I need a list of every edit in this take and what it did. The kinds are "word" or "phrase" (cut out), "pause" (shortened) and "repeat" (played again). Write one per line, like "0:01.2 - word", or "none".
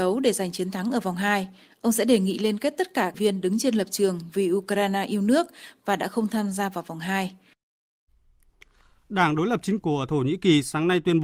0:03.1 - phrase
0:09.8 - word